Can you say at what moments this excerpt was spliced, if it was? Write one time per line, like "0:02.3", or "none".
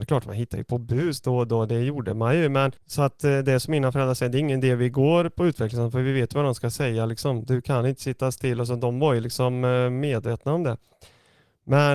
0:02.8